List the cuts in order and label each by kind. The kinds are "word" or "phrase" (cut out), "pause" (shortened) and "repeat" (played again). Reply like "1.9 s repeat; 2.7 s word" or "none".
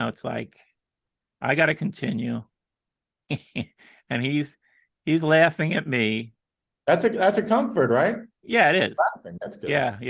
none